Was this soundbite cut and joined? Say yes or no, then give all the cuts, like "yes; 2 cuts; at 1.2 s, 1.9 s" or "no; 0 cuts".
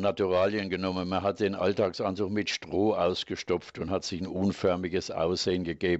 no; 0 cuts